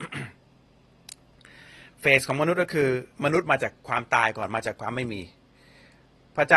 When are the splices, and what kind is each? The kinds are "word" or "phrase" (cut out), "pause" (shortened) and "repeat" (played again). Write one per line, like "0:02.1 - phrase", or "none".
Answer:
0:03.1 - pause

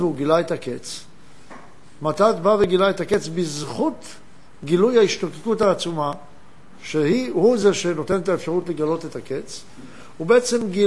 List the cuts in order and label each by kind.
none

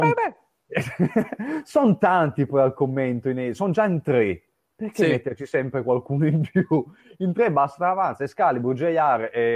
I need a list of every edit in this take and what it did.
none

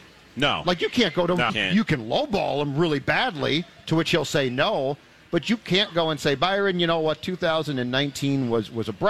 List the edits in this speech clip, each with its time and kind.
0:01.5 - word

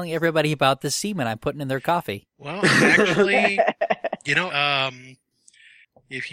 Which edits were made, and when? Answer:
0:04.5 - word

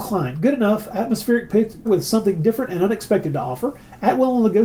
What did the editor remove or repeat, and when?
0:01.8 - word

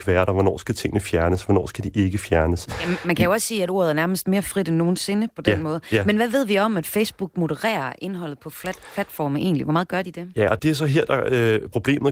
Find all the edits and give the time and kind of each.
0:10.6 - word

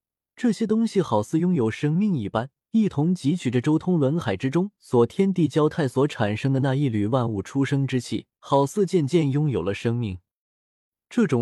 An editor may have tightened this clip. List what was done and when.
0:02.6 - pause
0:08.3 - pause

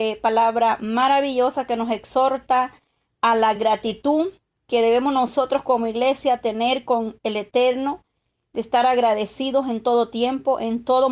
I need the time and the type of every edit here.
none

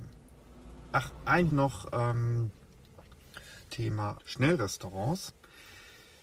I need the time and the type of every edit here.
0:01.5 - word
0:03.7 - word
0:04.2 - phrase

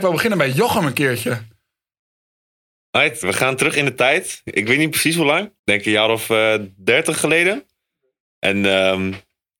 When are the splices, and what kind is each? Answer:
0:03.2 - word
0:05.6 - pause

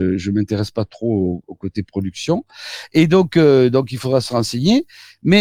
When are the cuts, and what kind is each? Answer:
none

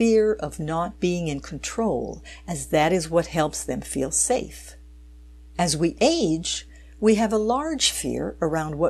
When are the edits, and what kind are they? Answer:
none

